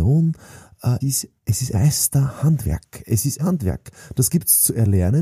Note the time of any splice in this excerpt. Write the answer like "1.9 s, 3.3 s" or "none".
1.0 s, 1.4 s, 1.7 s, 3.4 s